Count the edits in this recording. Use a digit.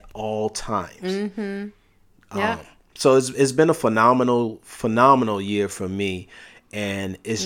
0